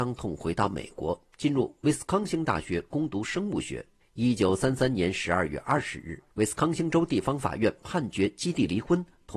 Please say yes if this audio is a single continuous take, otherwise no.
no